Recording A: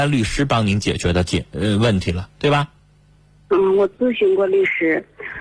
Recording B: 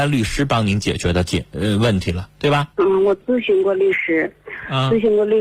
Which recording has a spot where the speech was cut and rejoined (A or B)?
B